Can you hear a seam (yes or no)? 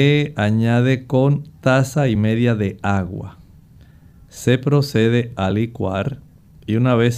no